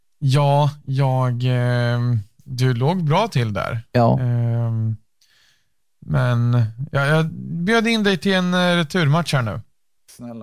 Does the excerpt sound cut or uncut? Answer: uncut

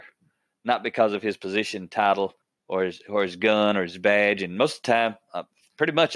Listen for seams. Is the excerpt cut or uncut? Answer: cut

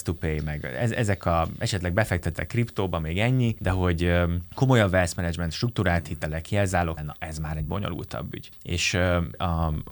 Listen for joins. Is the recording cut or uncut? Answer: cut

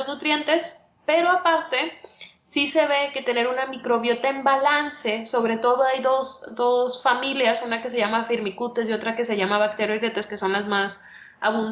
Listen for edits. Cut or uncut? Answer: uncut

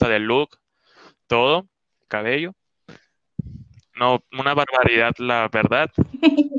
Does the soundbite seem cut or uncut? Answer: cut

